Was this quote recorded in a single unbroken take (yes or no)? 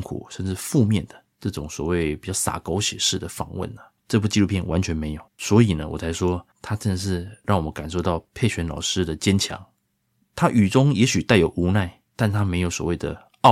no